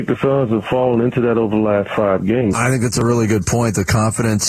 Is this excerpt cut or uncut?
uncut